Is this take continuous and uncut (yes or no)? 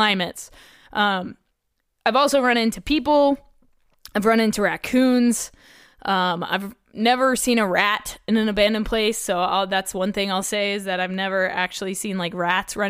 yes